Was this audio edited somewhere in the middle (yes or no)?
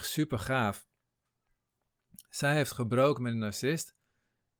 no